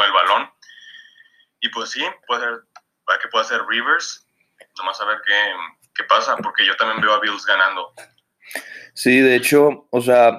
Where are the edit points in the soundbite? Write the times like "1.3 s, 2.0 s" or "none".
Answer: 2.2 s